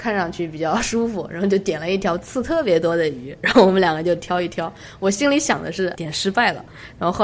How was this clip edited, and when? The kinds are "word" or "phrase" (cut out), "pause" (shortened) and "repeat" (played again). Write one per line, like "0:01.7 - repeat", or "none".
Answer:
0:06.0 - word